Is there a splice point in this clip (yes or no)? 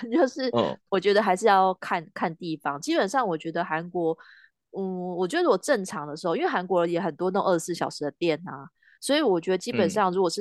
no